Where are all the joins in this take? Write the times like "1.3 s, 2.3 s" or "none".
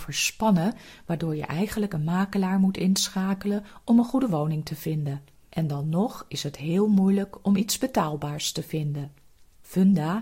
none